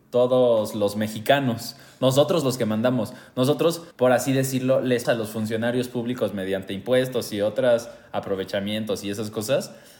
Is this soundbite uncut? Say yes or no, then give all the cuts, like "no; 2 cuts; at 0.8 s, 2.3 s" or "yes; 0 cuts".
no; 3 cuts; at 2.4 s, 3.9 s, 5.0 s